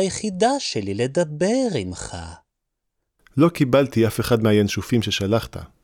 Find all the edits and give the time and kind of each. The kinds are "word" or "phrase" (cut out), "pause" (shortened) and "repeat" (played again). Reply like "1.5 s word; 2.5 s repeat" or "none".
none